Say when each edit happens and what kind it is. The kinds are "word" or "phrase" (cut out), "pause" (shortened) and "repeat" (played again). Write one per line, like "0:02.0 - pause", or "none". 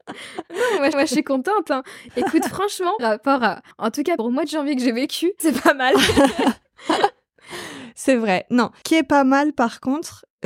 0:00.9 - repeat
0:03.0 - word
0:03.7 - pause
0:04.2 - phrase
0:05.4 - phrase
0:08.8 - word